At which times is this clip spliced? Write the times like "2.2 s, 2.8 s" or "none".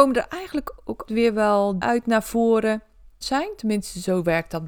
1.1 s, 1.8 s, 3.2 s

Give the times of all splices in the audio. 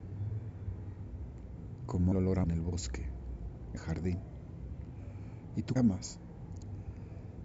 2.1 s, 2.4 s, 3.8 s, 5.8 s

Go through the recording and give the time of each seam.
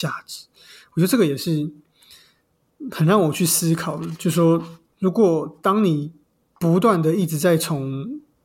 none

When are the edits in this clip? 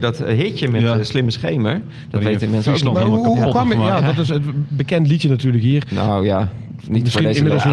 none

